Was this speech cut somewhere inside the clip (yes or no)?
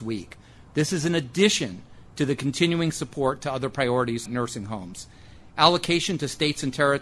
yes